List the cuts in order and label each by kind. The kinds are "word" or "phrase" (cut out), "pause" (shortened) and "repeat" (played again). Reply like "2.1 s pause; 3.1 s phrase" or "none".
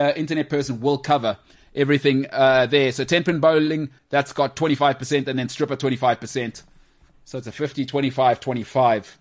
4.0 s word